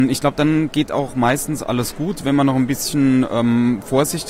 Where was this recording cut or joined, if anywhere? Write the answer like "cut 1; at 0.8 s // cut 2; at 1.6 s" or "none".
none